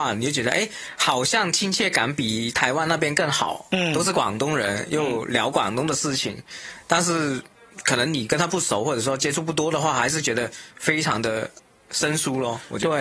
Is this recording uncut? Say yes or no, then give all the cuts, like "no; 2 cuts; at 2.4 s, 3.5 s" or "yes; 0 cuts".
yes; 0 cuts